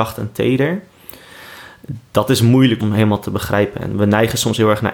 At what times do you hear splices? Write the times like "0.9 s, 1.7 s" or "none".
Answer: 2.8 s